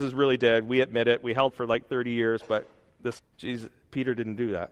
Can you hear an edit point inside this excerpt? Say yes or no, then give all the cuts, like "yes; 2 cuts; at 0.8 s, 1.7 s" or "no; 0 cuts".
yes; 2 cuts; at 1.5 s, 3.2 s